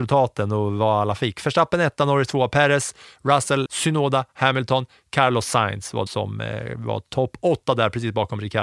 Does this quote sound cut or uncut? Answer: cut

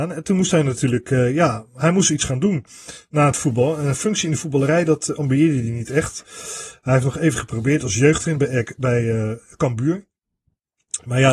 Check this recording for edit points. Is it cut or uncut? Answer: uncut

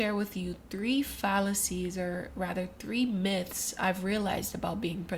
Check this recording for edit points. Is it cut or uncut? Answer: uncut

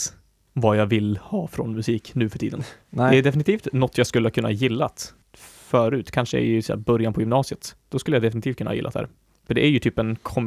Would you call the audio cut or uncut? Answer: cut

